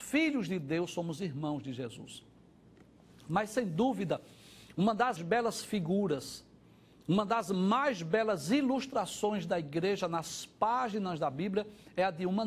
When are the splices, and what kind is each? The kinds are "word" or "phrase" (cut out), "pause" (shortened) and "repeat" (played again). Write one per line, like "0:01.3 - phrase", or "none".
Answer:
0:05.2 - word